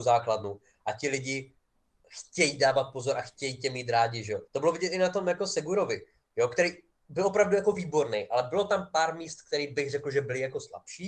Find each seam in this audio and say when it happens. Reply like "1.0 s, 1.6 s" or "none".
4.5 s

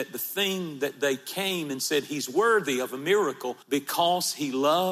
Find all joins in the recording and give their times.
3.6 s

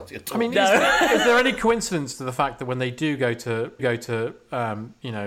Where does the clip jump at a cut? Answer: 3.8 s

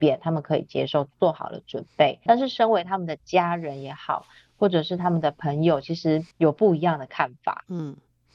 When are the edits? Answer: 2.3 s, 6.3 s

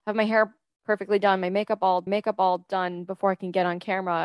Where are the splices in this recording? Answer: 2.1 s

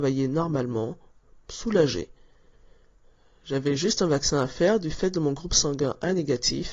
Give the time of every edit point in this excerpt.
none

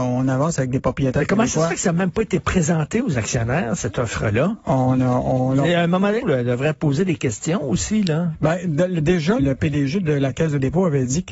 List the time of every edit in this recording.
6.2 s, 9.4 s

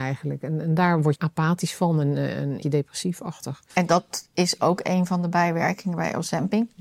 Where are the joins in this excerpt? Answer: 1.2 s, 2.6 s, 3.7 s

